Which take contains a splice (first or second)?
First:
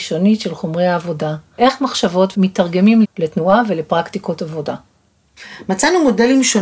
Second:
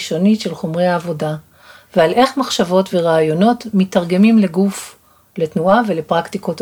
first